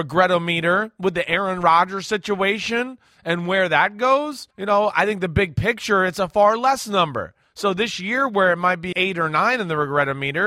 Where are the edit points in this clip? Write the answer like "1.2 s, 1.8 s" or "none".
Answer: 4.5 s, 8.9 s